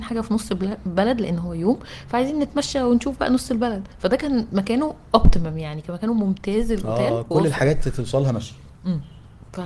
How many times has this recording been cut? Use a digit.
0